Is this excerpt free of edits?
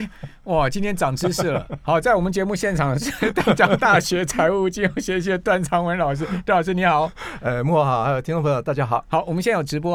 yes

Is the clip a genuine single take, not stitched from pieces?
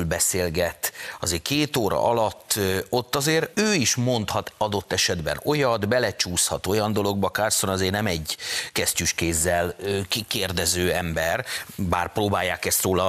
no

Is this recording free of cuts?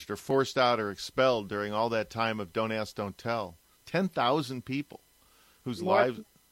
yes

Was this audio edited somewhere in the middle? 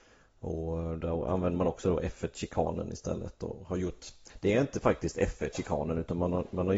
no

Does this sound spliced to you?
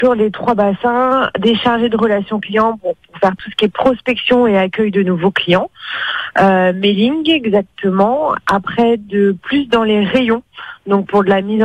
no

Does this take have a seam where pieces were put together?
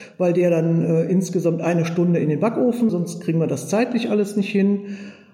yes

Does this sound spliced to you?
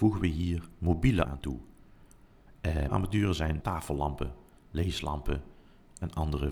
yes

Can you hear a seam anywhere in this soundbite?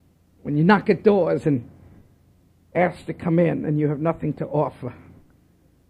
no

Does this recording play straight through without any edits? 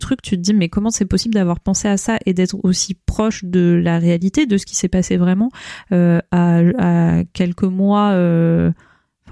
yes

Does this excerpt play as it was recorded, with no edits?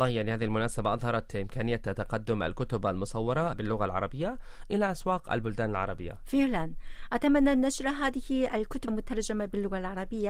no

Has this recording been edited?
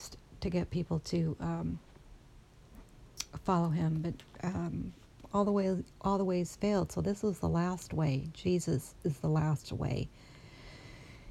no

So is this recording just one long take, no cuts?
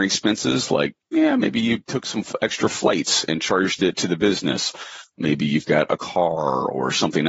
yes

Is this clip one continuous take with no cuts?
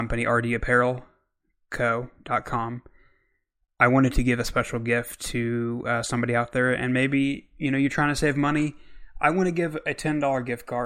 yes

